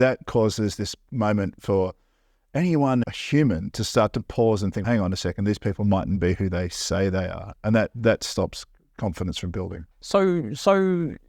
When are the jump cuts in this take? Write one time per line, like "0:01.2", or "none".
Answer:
0:03.0
0:04.8
0:09.9